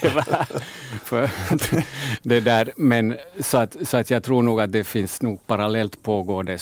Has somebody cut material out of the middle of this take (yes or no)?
no